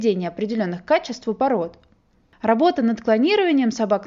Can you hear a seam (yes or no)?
no